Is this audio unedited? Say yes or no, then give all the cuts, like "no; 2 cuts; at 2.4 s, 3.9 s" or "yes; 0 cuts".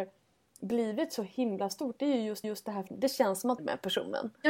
no; 3 cuts; at 2.4 s, 2.9 s, 3.6 s